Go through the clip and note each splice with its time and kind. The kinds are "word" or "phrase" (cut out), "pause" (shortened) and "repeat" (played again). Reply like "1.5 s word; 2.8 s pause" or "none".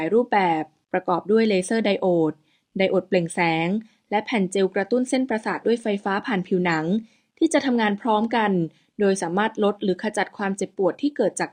none